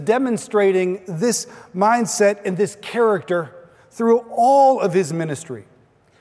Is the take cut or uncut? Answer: uncut